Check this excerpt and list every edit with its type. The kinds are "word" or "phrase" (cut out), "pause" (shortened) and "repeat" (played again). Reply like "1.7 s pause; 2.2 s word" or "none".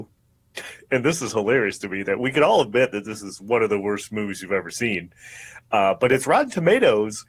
none

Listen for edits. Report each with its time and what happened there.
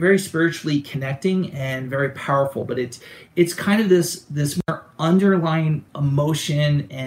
5.9 s pause

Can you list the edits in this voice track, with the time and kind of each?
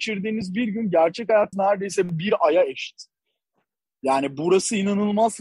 1.5 s word

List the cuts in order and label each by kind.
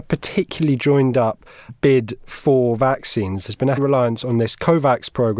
1.7 s word; 3.8 s word

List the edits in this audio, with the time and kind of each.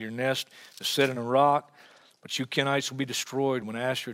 none

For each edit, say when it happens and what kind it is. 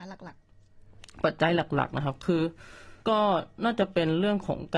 3.0 s pause

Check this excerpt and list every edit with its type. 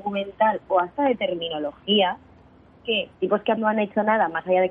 3.1 s pause; 3.6 s word

